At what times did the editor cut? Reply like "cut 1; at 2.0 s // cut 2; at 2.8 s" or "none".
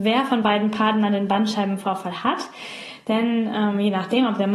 none